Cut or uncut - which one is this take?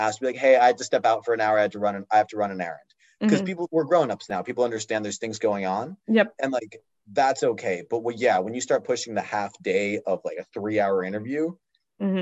uncut